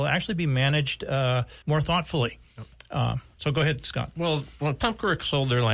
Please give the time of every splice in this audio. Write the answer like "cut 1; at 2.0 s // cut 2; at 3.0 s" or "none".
cut 1; at 1.6 s